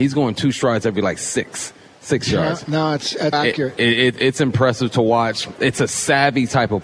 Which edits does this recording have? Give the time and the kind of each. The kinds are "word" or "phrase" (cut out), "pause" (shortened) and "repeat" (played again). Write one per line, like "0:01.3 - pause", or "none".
0:03.3 - word